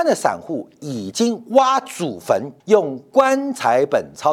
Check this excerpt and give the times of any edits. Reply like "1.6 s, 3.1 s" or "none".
2.6 s